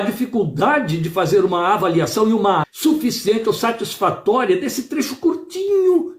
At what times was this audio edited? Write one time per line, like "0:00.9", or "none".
0:02.6